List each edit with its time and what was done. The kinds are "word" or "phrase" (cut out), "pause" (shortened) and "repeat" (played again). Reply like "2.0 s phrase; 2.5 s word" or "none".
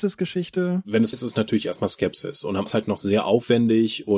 1.1 s word; 2.7 s phrase